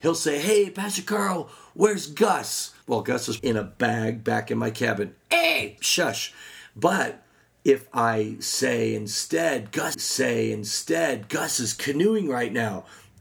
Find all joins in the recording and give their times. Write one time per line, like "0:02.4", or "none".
0:02.8
0:03.4
0:05.8
0:09.9